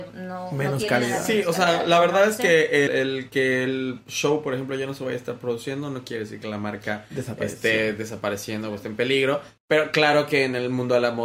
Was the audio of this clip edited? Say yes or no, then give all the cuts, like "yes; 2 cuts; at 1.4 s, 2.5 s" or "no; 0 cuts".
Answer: yes; 2 cuts; at 2.9 s, 9.6 s